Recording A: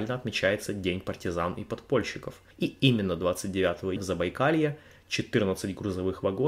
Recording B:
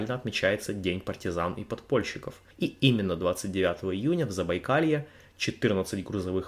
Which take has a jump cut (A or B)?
A